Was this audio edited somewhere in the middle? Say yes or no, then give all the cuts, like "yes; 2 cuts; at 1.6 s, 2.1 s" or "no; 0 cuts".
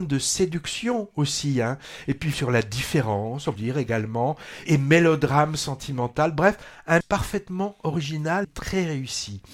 yes; 5 cuts; at 2.3 s, 3.6 s, 4.7 s, 7.0 s, 8.4 s